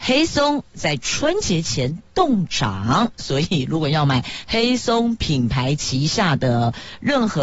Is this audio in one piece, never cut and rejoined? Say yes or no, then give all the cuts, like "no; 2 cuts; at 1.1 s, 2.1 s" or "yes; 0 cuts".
yes; 0 cuts